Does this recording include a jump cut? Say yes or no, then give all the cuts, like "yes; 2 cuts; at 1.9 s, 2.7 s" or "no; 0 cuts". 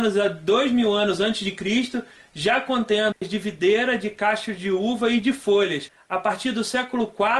yes; 1 cut; at 3.1 s